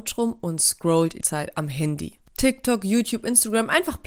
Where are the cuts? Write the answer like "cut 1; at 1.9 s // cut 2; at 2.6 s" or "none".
cut 1; at 1.2 s // cut 2; at 2.3 s